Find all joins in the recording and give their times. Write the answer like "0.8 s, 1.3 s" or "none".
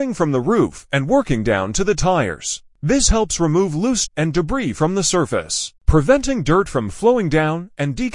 4.1 s, 5.8 s